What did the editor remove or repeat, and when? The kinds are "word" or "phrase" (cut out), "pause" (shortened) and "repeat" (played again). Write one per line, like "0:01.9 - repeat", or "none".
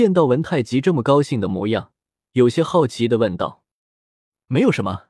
none